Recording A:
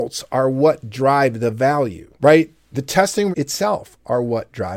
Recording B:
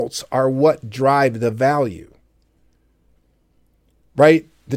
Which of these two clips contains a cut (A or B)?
A